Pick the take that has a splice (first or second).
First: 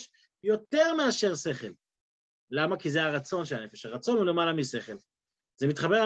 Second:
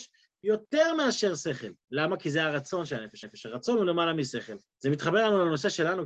second